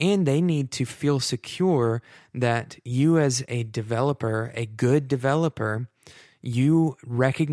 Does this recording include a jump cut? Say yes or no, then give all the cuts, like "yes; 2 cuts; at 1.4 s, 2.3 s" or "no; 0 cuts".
no; 0 cuts